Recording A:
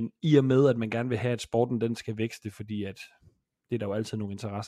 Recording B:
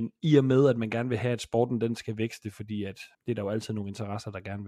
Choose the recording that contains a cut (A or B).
B